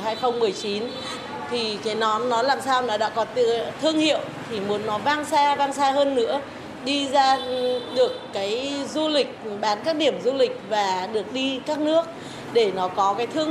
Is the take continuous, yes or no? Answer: yes